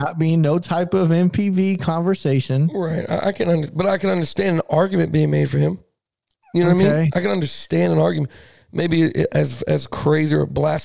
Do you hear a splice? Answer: no; 0 cuts

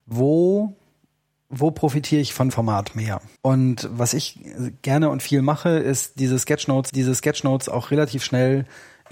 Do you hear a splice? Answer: yes; 3 cuts; at 2.5 s, 3.4 s, 6.9 s

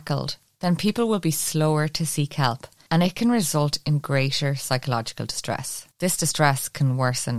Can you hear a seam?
no; 0 cuts

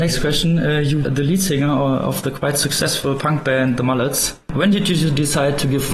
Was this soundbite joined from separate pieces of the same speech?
yes; 1 cut; at 1.0 s

